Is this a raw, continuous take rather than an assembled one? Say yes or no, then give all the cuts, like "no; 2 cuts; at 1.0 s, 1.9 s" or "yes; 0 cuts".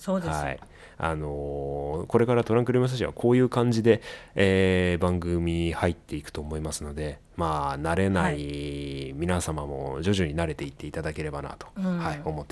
yes; 0 cuts